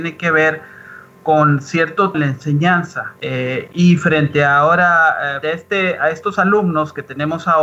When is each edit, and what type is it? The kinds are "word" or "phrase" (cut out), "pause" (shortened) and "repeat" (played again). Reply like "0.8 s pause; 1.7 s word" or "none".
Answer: 2.1 s word; 3.2 s pause; 5.4 s word

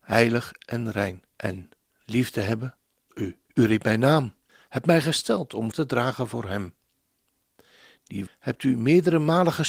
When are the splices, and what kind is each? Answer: 1.3 s pause; 3.1 s word; 3.4 s pause; 4.5 s pause; 5.7 s word; 8.3 s word

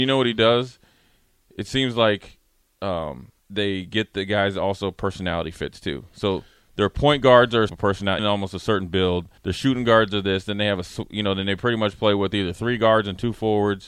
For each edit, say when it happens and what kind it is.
3.4 s pause; 7.7 s phrase; 8.2 s word; 9.4 s pause

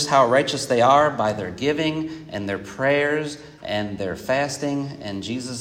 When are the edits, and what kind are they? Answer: none

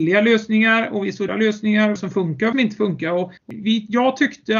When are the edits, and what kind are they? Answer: 1.3 s word; 2.0 s phrase; 2.5 s phrase; 3.4 s pause

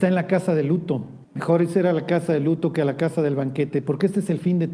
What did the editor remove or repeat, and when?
1.2 s pause

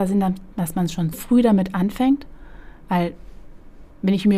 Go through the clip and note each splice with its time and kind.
1.1 s word

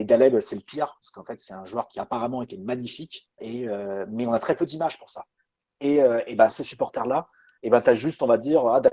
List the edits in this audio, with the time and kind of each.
3.4 s word; 6.5 s word

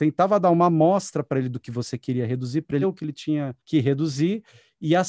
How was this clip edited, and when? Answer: 2.8 s word; 3.6 s pause

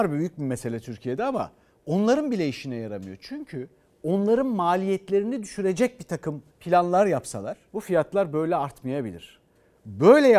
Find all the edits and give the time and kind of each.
6.5 s pause; 7.7 s pause

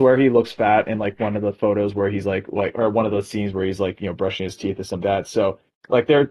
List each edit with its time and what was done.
5.0 s word

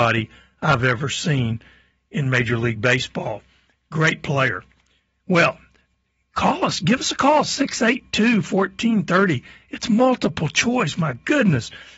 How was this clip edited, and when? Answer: none

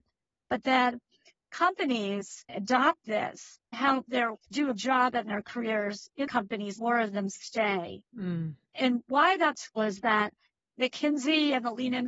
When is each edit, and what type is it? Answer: 2.5 s word; 3.7 s word; 4.3 s word; 4.8 s word; 5.2 s word; 6.3 s word; 6.8 s word; 9.8 s word

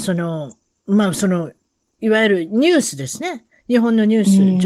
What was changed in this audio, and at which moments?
none

